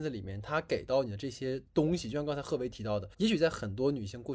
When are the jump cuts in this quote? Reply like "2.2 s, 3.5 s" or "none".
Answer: 3.1 s